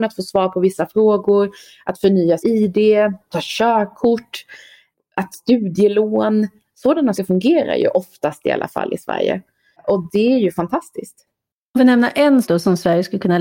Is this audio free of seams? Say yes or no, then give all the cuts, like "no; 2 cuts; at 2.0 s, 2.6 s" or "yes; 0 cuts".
no; 6 cuts; at 2.4 s, 3.3 s, 5.3 s, 7.2 s, 11.8 s, 12.4 s